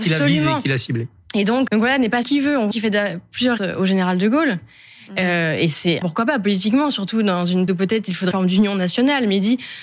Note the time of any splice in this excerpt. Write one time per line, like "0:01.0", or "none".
0:01.7
0:02.2
0:02.7
0:03.6
0:06.0
0:07.7
0:08.3